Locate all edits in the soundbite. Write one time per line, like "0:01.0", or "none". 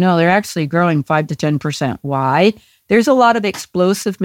none